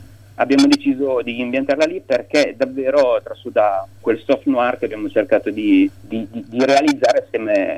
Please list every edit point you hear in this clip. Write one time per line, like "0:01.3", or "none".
0:06.0